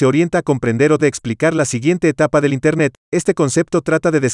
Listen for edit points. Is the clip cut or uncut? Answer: cut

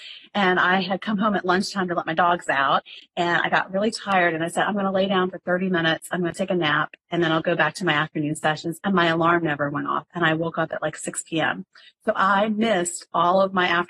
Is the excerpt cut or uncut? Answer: uncut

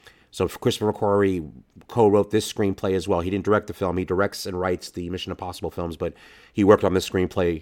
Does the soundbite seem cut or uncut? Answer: uncut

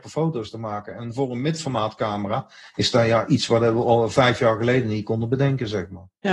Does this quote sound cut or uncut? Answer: uncut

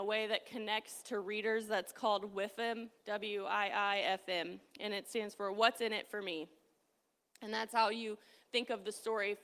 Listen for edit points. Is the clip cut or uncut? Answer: uncut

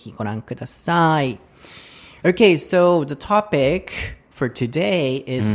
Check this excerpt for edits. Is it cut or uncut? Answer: uncut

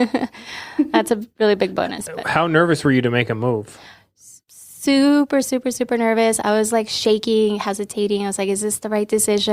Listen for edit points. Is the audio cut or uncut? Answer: uncut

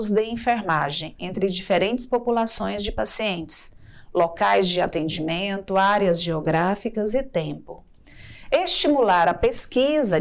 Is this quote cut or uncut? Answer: uncut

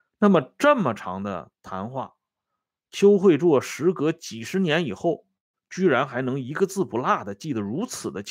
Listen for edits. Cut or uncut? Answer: uncut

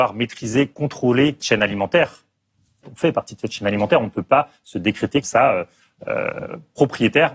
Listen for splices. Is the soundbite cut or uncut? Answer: cut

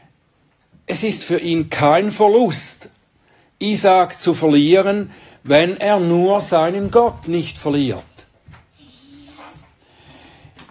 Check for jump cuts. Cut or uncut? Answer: uncut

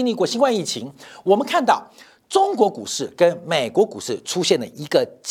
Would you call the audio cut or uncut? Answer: uncut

